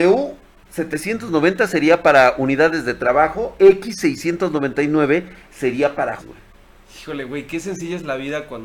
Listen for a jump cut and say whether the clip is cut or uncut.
cut